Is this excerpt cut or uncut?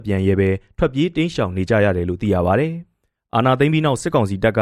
uncut